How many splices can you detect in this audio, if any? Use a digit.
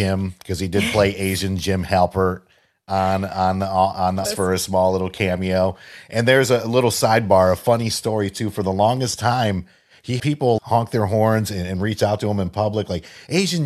3